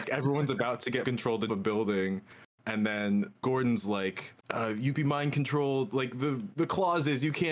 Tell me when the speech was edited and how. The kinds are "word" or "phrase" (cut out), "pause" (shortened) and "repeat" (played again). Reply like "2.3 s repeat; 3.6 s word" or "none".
1.0 s word; 1.5 s phrase; 3.4 s phrase; 4.4 s pause; 4.9 s word